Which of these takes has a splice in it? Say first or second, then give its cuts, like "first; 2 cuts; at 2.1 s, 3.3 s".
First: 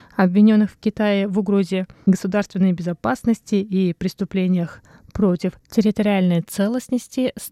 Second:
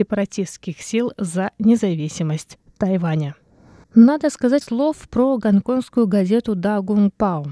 second; 1 cut; at 4.6 s